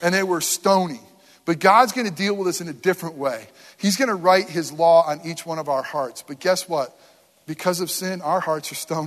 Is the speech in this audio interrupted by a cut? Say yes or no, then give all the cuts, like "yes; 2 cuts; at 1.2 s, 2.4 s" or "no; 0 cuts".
no; 0 cuts